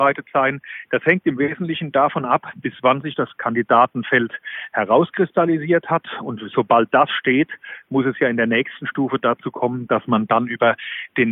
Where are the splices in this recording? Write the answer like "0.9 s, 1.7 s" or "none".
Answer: none